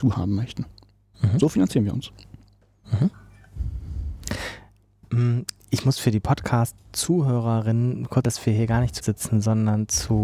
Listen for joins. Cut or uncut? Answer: cut